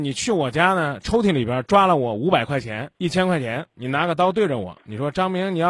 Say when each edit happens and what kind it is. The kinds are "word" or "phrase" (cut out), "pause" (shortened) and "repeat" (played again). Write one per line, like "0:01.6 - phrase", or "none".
0:02.9 - pause
0:03.7 - phrase